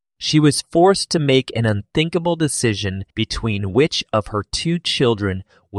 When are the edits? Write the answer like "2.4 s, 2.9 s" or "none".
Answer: 3.1 s

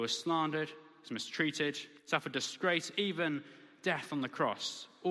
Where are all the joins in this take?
2.0 s

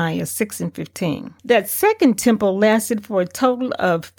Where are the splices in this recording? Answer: 1.4 s

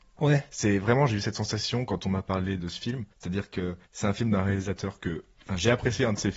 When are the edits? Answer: 2.6 s, 3.1 s, 3.8 s, 5.3 s

